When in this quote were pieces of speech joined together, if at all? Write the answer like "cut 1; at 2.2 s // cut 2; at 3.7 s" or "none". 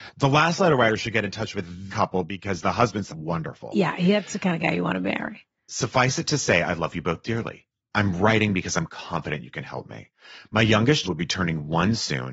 cut 1; at 1.9 s // cut 2; at 3.1 s // cut 3; at 11.0 s